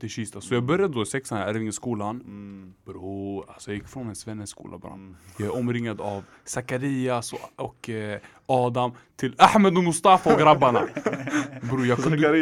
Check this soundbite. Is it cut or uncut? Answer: uncut